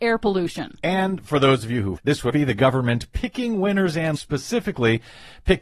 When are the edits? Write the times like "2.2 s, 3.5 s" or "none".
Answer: 2.0 s, 2.3 s, 4.2 s